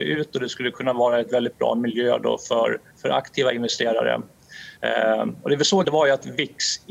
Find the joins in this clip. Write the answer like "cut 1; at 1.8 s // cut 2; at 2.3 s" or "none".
cut 1; at 2.9 s // cut 2; at 4.8 s // cut 3; at 5.8 s